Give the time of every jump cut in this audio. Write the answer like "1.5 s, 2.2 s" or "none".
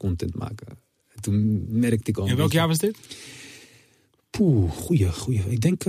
none